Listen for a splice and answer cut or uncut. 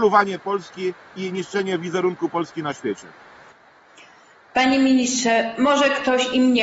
uncut